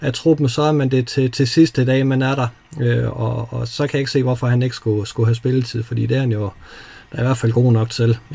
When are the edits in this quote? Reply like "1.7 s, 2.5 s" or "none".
none